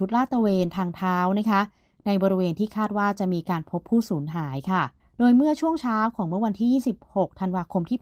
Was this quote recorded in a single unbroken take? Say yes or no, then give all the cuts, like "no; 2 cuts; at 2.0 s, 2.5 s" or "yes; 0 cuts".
no; 1 cut; at 5.0 s